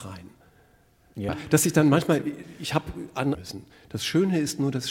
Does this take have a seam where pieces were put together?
yes; 2 cuts; at 1.3 s, 3.3 s

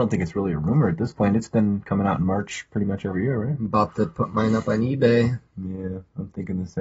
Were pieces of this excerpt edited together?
no; 0 cuts

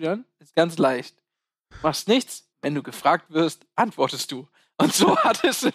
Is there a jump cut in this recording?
yes; 1 cut; at 2.5 s

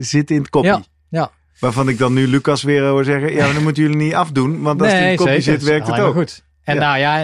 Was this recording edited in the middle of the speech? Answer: no; 0 cuts

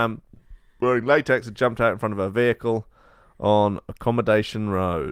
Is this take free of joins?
yes; 0 cuts

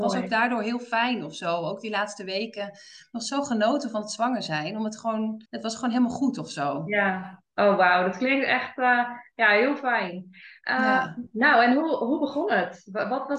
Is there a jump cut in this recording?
yes; 1 cut; at 5.5 s

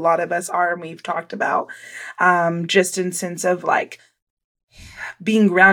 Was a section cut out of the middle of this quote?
no; 0 cuts

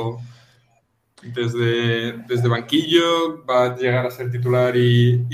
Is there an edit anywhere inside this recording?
no; 0 cuts

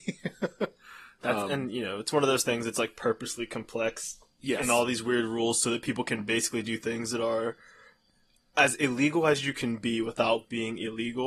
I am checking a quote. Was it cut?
no; 0 cuts

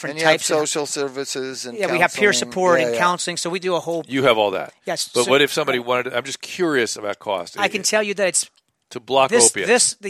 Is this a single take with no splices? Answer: yes; 0 cuts

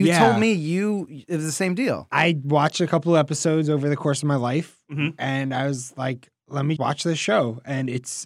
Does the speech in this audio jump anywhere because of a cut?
yes; 1 cut; at 6.8 s

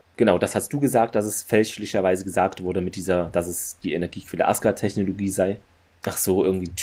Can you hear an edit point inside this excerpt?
no; 0 cuts

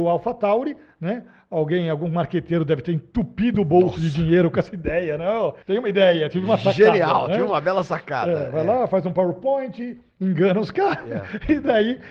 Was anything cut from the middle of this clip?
yes; 1 cut; at 5.6 s

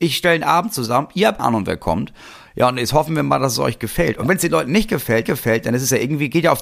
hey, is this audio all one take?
no; 2 cuts; at 1.4 s, 5.3 s

